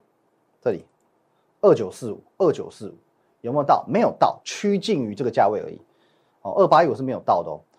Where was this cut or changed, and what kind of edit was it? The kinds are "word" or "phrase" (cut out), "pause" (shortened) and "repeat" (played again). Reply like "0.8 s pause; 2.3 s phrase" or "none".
2.3 s pause